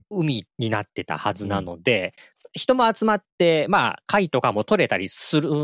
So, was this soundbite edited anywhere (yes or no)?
no